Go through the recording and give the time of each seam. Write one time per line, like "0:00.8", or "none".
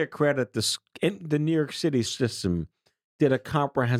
0:02.0